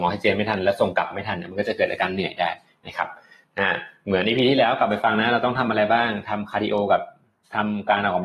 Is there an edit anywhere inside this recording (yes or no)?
no